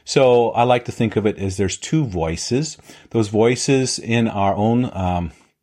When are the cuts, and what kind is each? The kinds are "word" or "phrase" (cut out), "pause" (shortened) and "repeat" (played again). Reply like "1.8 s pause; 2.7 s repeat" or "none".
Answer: none

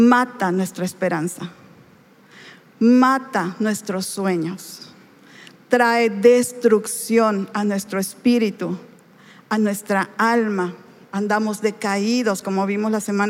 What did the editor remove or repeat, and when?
none

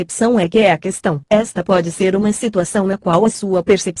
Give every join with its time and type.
none

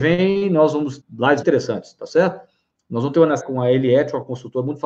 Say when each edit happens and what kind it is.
1.0 s word; 1.4 s word; 3.4 s word

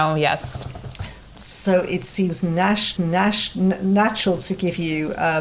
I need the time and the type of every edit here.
3.0 s repeat

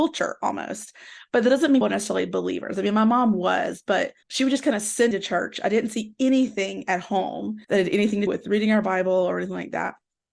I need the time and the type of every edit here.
1.8 s word; 4.2 s pause; 5.1 s word; 7.6 s pause; 8.3 s word

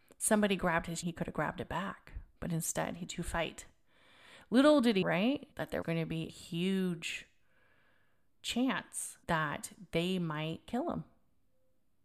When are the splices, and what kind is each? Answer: 1.0 s word; 2.3 s pause; 3.1 s word; 5.0 s word; 5.5 s pause; 5.8 s word; 6.3 s word; 9.2 s pause

